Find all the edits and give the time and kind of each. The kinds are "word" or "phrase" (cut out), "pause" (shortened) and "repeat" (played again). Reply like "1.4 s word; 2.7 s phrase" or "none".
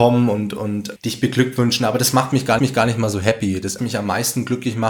1.0 s word; 2.6 s repeat; 3.8 s word